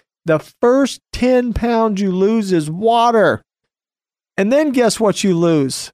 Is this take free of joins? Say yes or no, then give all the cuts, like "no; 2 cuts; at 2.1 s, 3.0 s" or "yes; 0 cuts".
yes; 0 cuts